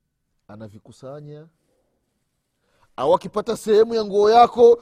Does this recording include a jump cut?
no; 0 cuts

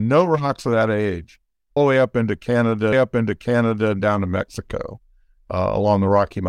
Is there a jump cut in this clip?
yes; 2 cuts; at 1.8 s, 2.9 s

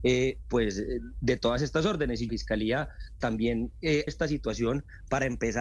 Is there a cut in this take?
yes; 3 cuts; at 2.3 s, 3.2 s, 4.1 s

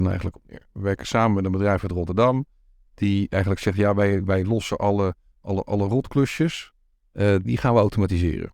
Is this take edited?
yes; 1 cut; at 7.4 s

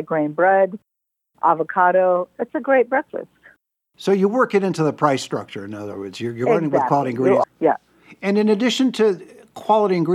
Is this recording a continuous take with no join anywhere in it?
no; 1 cut; at 7.4 s

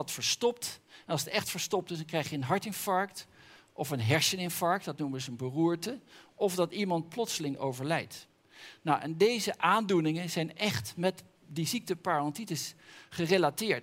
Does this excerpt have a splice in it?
no; 0 cuts

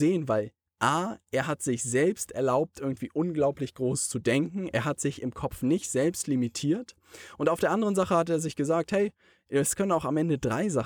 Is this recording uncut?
yes; 0 cuts

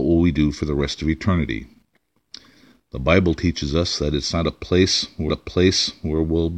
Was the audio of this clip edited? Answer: yes; 1 cut; at 5.3 s

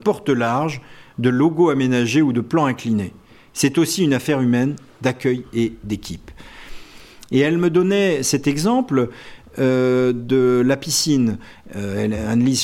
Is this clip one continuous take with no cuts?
yes; 0 cuts

